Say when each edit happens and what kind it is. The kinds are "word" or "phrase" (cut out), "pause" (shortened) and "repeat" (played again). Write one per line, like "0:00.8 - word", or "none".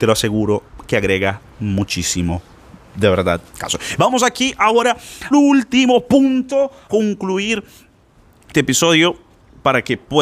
0:03.5 - word
0:05.3 - word
0:06.9 - word
0:08.5 - word